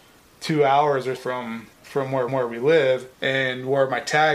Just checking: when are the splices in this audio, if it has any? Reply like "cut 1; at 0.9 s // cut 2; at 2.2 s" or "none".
cut 1; at 1.2 s // cut 2; at 1.7 s // cut 3; at 2.3 s // cut 4; at 3.1 s